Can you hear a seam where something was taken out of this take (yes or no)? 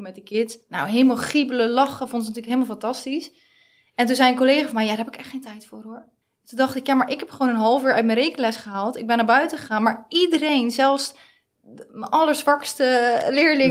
yes